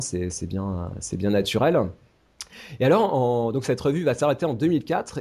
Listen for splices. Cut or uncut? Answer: uncut